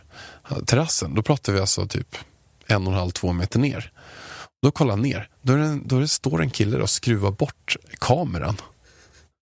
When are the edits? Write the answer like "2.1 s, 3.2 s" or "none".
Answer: none